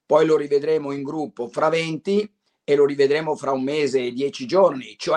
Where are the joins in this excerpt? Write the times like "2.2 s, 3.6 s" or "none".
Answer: none